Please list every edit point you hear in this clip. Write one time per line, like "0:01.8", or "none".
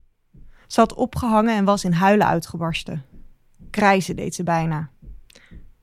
none